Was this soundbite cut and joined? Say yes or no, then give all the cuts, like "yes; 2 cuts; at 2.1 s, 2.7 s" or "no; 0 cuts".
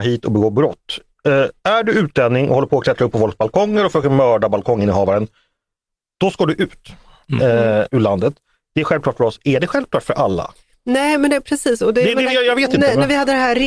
no; 0 cuts